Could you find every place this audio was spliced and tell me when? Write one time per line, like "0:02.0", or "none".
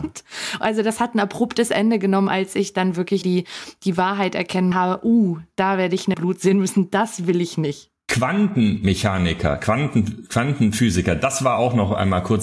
0:03.2
0:04.7
0:06.1

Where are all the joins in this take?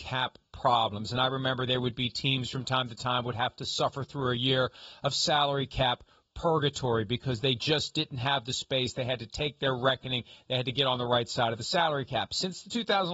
none

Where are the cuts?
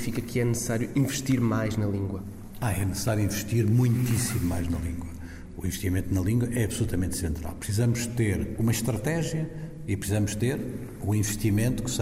none

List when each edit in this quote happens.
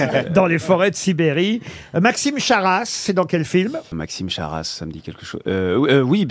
0:03.9

